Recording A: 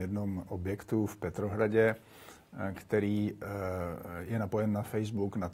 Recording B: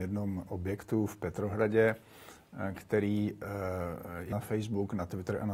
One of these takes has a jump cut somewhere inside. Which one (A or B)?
B